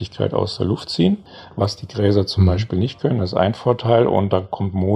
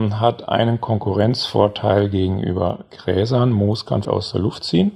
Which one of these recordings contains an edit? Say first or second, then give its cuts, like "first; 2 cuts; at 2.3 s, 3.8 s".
second; 1 cut; at 4.0 s